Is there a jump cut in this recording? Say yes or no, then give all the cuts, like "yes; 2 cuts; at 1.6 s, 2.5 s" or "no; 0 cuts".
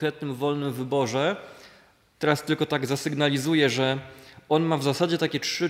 no; 0 cuts